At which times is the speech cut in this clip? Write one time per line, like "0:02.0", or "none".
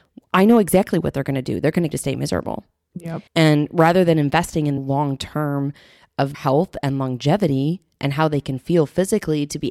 0:01.9
0:03.3
0:04.8
0:06.3